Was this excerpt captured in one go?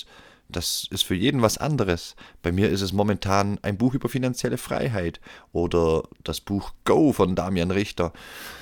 yes; 0 cuts

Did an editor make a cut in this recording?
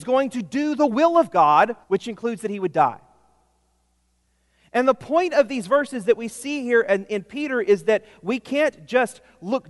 yes; 1 cut; at 1.8 s

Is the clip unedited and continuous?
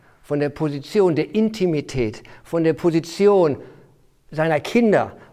yes; 0 cuts

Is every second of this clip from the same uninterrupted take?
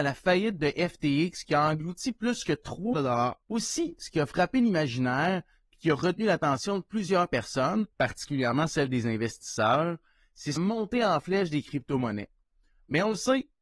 no; 4 cuts; at 2.9 s, 3.4 s, 7.9 s, 10.6 s

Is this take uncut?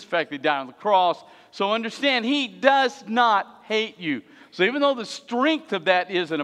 yes; 0 cuts

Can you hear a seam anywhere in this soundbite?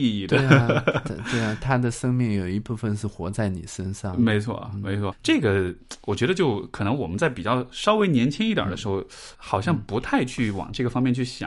yes; 2 cuts; at 5.1 s, 9.3 s

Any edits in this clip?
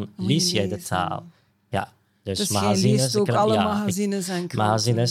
no; 0 cuts

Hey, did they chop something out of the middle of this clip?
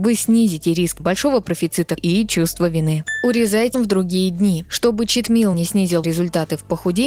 yes; 5 cuts; at 1.0 s, 2.0 s, 3.7 s, 5.5 s, 6.0 s

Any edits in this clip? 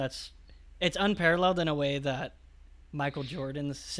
no; 0 cuts

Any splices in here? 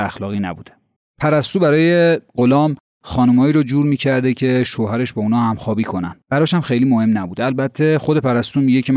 yes; 3 cuts; at 1.0 s, 2.3 s, 6.2 s

